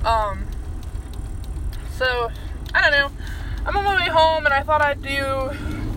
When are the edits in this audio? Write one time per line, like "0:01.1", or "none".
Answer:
none